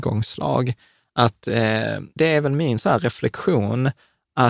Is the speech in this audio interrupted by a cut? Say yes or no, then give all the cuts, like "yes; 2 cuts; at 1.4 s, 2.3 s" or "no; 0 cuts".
yes; 1 cut; at 2.2 s